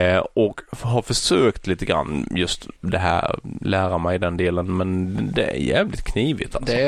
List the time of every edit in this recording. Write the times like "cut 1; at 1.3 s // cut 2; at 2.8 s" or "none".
cut 1; at 2.8 s